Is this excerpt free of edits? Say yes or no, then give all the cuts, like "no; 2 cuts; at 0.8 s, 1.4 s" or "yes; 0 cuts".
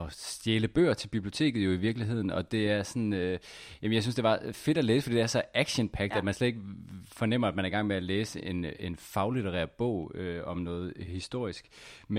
yes; 0 cuts